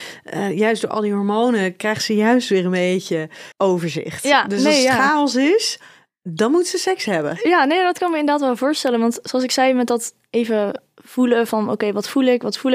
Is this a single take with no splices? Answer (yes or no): no